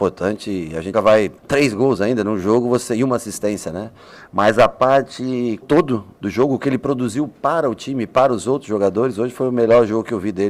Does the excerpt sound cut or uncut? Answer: cut